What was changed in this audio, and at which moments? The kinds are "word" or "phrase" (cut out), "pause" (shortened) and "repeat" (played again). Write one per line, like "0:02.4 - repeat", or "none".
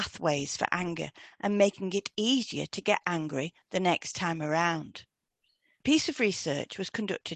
none